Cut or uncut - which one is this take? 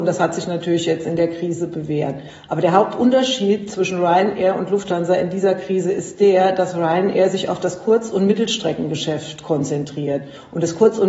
uncut